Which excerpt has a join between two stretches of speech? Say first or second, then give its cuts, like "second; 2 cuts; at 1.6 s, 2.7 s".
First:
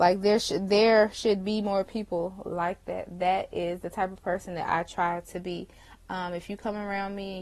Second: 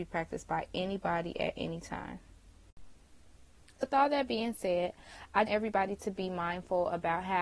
second; 2 cuts; at 3.8 s, 5.5 s